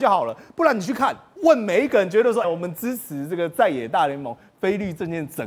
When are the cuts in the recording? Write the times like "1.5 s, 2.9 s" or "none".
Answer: 2.4 s